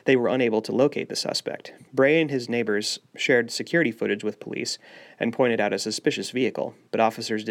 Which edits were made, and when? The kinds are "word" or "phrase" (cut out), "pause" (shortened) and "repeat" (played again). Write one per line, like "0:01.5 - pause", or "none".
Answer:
0:01.9 - pause